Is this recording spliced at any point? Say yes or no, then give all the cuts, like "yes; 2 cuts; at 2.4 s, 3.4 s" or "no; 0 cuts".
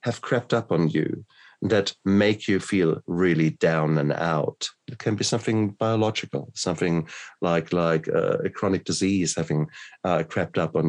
no; 0 cuts